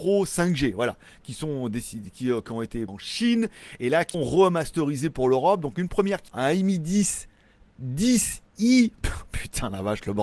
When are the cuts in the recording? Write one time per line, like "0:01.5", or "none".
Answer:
0:02.9
0:04.1
0:06.3